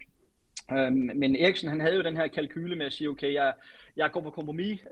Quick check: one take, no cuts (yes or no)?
yes